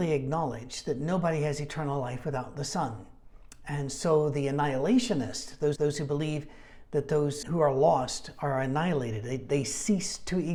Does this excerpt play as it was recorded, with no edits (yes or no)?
no